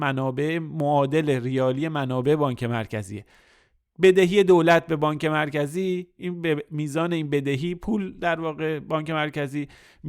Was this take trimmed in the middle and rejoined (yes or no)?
no